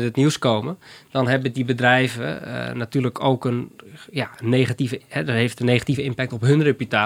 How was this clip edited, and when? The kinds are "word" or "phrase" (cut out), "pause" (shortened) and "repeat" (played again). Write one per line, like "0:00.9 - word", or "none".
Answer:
none